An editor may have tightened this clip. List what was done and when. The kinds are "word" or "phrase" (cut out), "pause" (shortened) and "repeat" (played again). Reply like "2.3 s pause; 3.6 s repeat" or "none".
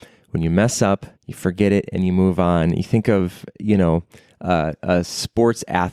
1.2 s pause